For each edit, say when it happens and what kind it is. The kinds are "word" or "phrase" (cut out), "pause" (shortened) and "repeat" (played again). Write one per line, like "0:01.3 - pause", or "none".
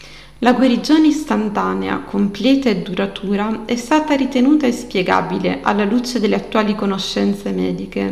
none